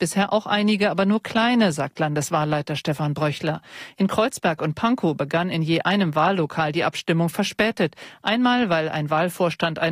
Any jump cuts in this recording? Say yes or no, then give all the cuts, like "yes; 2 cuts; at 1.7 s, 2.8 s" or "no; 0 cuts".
no; 0 cuts